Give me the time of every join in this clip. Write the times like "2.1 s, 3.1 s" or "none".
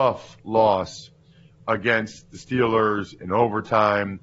none

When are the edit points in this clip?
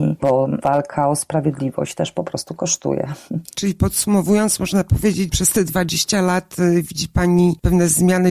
5.3 s

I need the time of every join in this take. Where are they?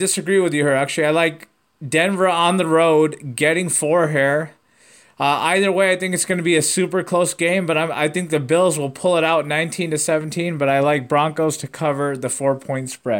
none

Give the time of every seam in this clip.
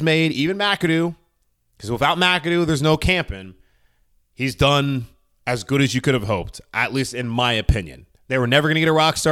none

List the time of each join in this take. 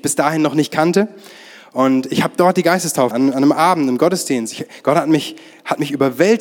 3.1 s

